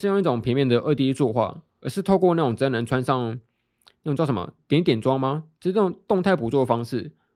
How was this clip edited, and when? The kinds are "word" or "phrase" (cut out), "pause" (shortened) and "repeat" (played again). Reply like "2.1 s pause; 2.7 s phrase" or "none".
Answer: none